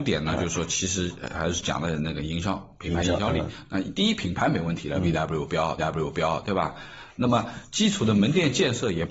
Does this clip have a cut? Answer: yes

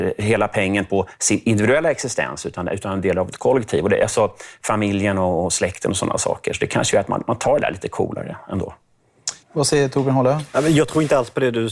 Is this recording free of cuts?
no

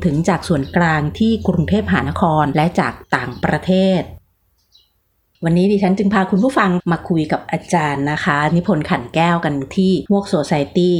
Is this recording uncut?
yes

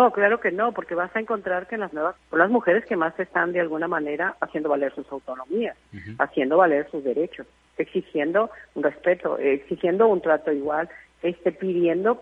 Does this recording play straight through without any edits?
no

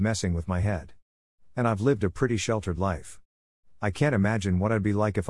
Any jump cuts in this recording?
no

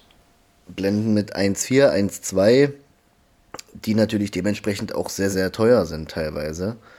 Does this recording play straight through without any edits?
no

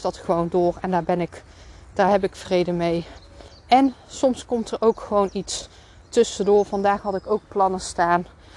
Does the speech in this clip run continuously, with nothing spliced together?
yes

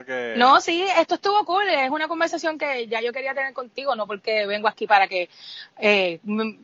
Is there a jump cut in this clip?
no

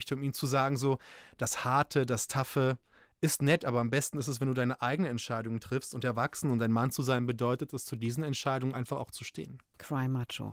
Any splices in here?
no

